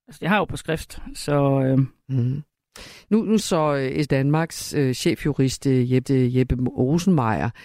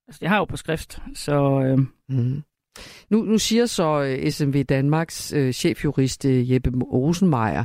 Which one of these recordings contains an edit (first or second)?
first